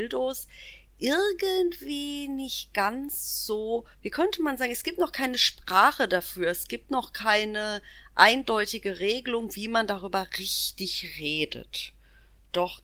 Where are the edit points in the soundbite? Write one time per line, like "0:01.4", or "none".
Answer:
0:03.9